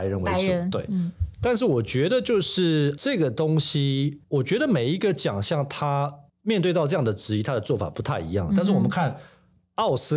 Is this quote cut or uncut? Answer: cut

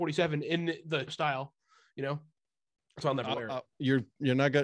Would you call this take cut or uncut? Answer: cut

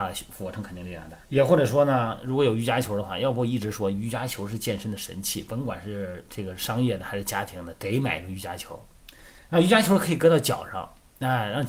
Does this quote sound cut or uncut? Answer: cut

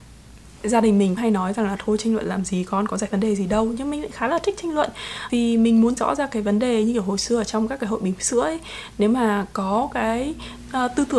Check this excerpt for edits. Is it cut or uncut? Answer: cut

